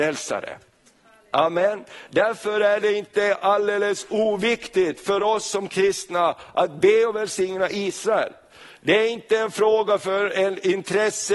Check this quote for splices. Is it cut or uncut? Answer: uncut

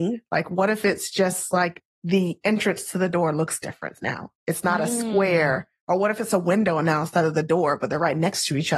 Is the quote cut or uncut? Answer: uncut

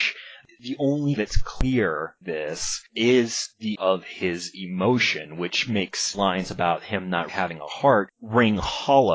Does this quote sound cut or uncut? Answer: cut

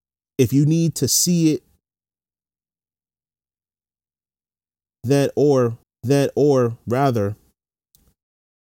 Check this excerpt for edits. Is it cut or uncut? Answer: cut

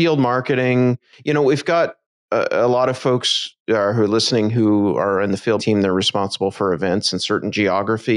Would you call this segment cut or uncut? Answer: cut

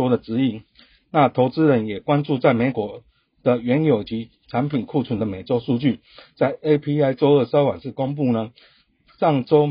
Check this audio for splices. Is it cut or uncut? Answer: uncut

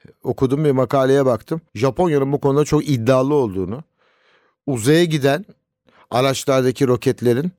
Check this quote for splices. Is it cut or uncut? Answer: cut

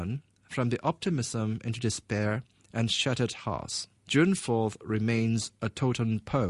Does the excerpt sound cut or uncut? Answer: cut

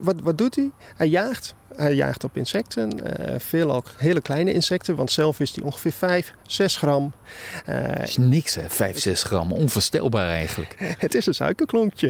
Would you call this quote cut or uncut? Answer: uncut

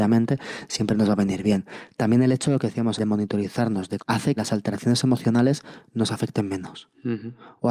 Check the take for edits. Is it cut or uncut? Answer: cut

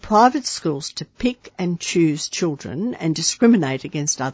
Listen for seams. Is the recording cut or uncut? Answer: uncut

